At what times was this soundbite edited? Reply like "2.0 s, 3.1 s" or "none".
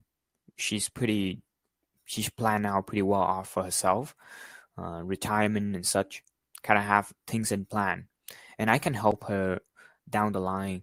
none